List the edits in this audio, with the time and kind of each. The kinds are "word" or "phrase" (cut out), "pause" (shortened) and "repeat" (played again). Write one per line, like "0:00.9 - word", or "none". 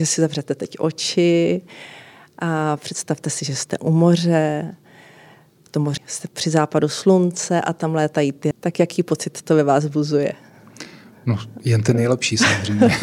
0:06.0 - word
0:08.5 - word